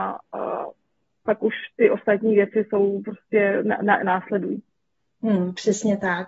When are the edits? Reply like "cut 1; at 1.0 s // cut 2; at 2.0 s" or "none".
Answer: none